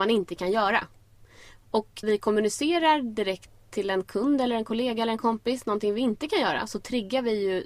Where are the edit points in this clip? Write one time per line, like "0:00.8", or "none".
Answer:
0:02.0